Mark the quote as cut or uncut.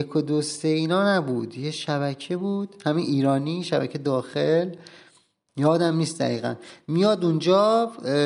uncut